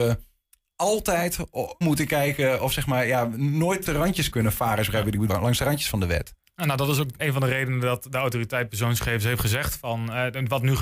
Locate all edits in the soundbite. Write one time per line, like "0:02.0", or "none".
0:01.8
0:03.9
0:04.3
0:05.3
0:07.2